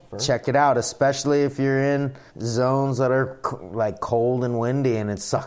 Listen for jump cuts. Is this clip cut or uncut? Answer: cut